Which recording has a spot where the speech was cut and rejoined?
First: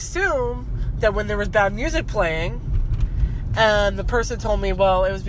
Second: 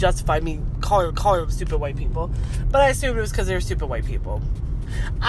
second; 1 cut; at 1.1 s

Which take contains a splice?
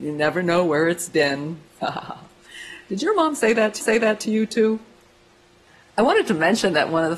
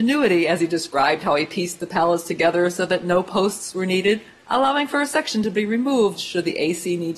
first; 1 cut; at 3.8 s

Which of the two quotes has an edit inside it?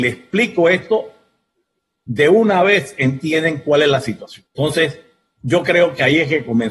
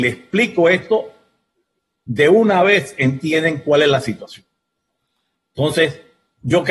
first; 1 cut; at 4.5 s

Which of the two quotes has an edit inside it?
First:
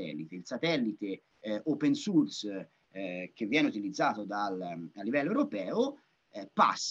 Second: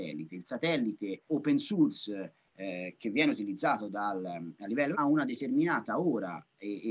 second; 2 cuts; at 1.3 s, 4.9 s

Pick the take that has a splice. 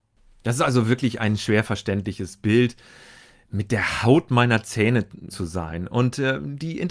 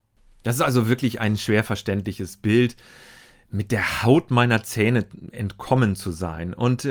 first; 1 cut; at 5.3 s

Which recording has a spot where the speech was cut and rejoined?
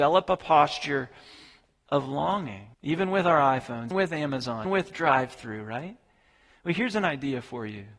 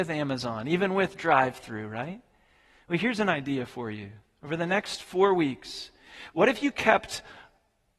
first; 3 cuts; at 2.7 s, 3.9 s, 4.6 s

